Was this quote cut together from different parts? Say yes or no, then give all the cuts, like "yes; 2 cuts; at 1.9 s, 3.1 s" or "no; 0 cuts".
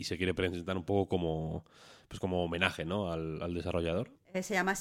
no; 0 cuts